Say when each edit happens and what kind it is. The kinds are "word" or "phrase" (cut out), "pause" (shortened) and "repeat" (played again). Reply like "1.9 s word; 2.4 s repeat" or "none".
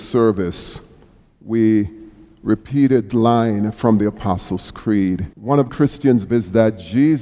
3.1 s word; 5.3 s pause; 5.7 s word; 6.3 s word